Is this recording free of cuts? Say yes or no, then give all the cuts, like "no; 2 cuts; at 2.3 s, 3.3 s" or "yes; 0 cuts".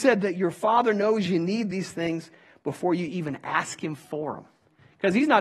yes; 0 cuts